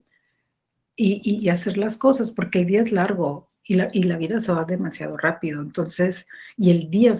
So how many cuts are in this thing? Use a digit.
0